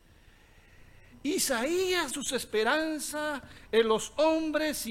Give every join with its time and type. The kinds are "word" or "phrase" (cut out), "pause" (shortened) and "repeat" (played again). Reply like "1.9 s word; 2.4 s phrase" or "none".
2.1 s phrase